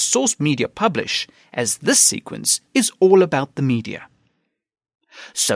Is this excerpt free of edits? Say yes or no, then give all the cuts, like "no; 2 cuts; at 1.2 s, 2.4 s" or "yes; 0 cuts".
yes; 0 cuts